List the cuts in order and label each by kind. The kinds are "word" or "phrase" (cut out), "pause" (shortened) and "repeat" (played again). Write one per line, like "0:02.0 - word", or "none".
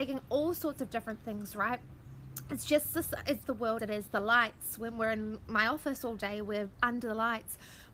0:03.4 - word
0:03.8 - word

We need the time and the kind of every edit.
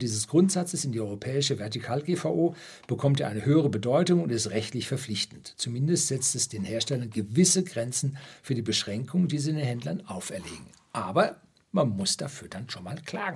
none

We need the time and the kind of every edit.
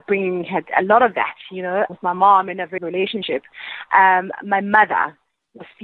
0:01.9 - word
0:02.8 - word

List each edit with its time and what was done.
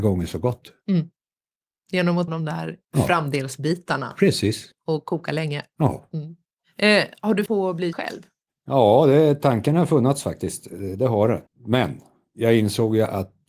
0:02.3 - word
0:07.5 - word
0:07.9 - word
0:11.5 - pause

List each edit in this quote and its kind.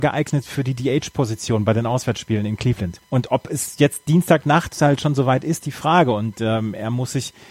0:03.0 - pause
0:05.6 - phrase

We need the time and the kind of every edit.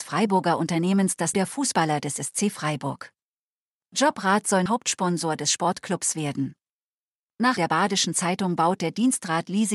0:01.3 - word
0:04.7 - word
0:07.6 - word

